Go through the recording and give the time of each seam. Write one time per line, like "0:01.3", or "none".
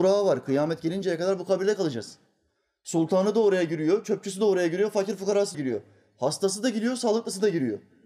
0:05.5